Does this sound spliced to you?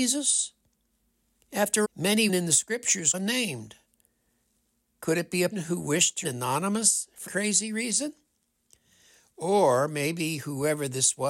yes; 6 cuts; at 1.8 s, 2.3 s, 3.1 s, 5.5 s, 6.2 s, 7.3 s

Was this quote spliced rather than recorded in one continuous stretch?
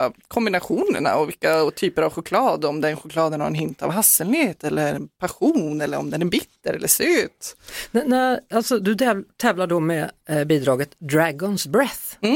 no; 0 cuts

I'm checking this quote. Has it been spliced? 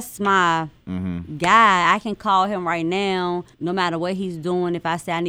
yes; 1 cut; at 3.5 s

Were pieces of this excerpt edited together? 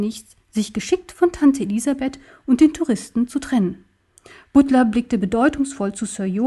no; 0 cuts

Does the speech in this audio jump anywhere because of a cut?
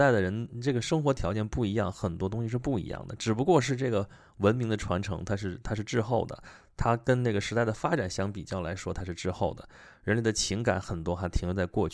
no; 0 cuts

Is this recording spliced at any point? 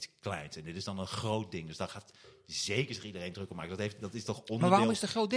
no; 0 cuts

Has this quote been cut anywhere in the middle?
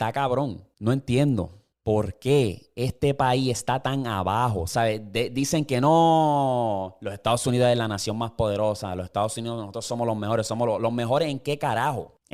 yes; 1 cut; at 1.7 s

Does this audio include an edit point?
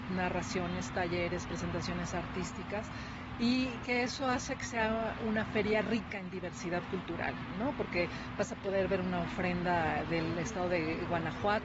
no; 0 cuts

